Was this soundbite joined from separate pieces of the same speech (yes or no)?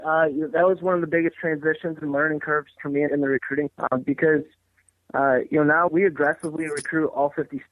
yes